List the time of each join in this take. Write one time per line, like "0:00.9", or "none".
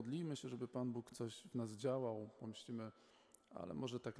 none